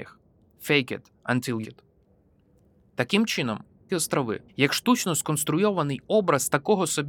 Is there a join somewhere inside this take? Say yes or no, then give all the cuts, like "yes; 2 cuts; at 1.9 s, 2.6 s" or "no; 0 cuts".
yes; 3 cuts; at 1.6 s, 3.9 s, 4.5 s